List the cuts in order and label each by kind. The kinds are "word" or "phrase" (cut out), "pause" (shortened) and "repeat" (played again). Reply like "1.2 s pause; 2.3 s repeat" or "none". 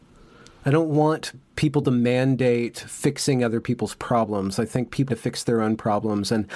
5.1 s word